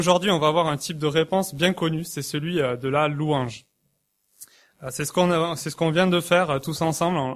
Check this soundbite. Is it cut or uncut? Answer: uncut